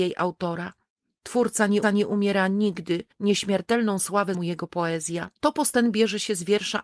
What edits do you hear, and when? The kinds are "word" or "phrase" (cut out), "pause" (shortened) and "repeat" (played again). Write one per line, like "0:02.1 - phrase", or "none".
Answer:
0:01.8 - repeat
0:03.1 - pause
0:04.3 - word
0:05.4 - pause